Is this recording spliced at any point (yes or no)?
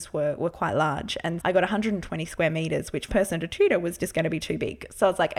yes